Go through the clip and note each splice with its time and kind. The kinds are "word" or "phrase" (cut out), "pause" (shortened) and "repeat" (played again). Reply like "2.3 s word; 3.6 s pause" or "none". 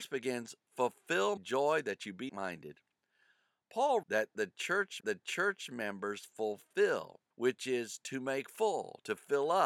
1.4 s word; 2.3 s word; 4.0 s word; 5.0 s repeat; 7.3 s pause

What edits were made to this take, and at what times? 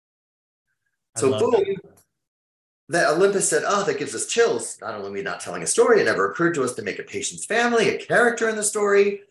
none

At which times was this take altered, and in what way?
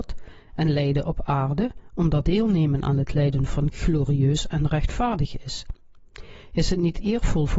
2.2 s word; 3.7 s word

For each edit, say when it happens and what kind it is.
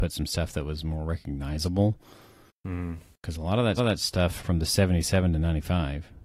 3.8 s repeat

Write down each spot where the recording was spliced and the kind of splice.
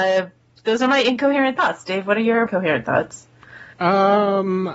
2.5 s word

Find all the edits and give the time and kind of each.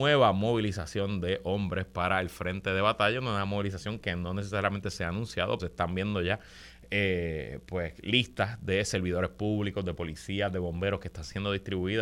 5.6 s word

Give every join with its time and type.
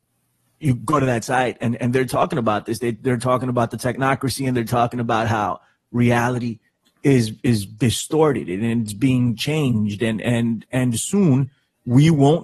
none

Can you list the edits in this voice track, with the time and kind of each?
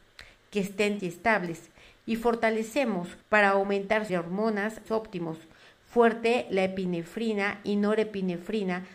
1.0 s phrase; 3.2 s pause; 4.1 s phrase; 4.9 s phrase

